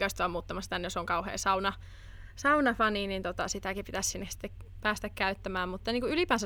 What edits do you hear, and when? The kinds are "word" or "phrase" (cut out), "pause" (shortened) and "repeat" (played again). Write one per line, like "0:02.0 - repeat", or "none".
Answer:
none

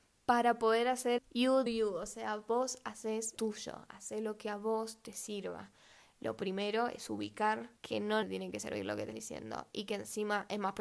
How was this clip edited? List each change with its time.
0:01.2 - word
0:01.7 - word
0:03.4 - word
0:07.8 - pause
0:08.2 - word
0:09.1 - word

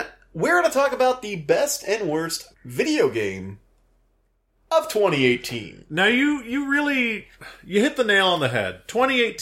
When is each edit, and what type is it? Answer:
0:02.5 - pause

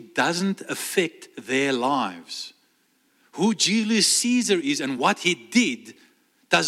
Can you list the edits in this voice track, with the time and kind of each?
none

